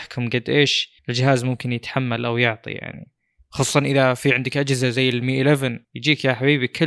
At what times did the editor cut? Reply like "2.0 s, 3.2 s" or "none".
1.0 s, 5.8 s